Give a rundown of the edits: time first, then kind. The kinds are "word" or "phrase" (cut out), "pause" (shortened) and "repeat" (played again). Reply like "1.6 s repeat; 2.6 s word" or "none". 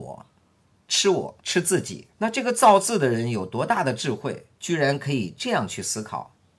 1.4 s pause; 2.1 s pause